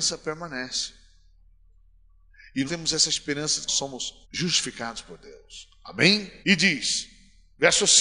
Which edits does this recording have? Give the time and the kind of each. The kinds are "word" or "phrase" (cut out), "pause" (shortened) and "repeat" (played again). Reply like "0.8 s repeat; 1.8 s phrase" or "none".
2.7 s word; 3.7 s phrase; 4.2 s pause; 6.4 s pause